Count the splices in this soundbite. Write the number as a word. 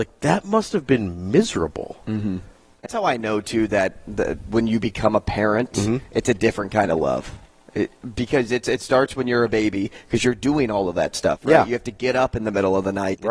one